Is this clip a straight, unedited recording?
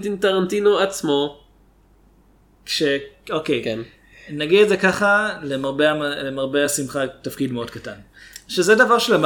yes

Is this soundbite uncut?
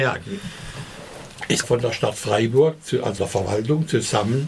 no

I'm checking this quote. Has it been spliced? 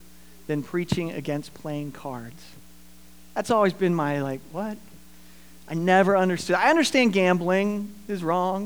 no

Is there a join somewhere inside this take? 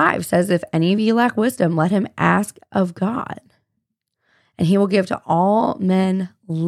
no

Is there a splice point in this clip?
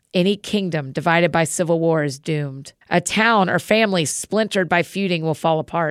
yes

